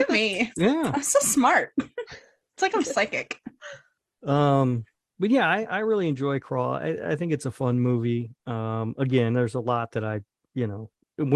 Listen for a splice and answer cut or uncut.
uncut